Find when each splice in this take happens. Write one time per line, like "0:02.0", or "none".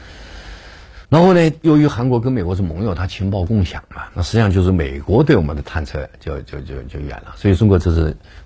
0:01.0